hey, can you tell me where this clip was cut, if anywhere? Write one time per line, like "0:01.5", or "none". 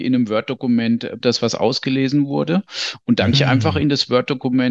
0:01.2
0:03.3